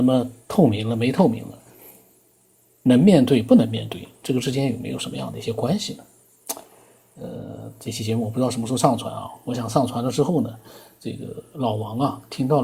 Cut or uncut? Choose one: uncut